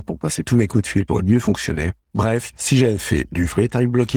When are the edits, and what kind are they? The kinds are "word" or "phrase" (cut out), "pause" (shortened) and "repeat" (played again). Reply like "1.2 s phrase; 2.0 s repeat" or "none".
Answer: 1.1 s word